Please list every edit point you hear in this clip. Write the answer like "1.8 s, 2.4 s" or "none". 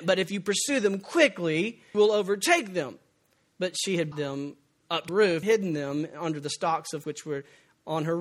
1.9 s, 4.1 s, 5.1 s, 5.4 s, 7.0 s